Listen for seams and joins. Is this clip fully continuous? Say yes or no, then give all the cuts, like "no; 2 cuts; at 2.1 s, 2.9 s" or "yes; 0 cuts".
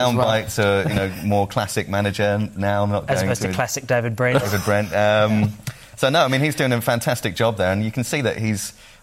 yes; 0 cuts